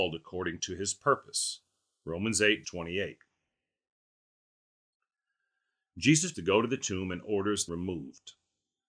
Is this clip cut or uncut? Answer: cut